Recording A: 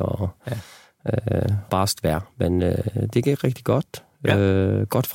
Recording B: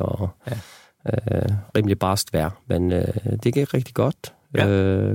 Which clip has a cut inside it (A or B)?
A